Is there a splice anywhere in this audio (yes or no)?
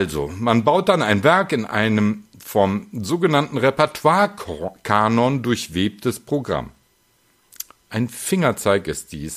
no